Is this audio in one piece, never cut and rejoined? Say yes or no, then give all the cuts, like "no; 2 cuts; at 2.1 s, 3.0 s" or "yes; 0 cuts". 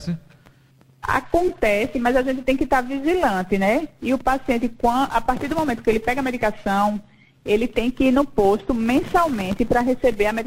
yes; 0 cuts